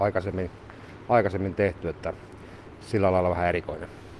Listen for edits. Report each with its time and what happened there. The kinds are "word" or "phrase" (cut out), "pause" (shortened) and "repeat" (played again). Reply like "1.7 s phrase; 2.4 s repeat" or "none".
none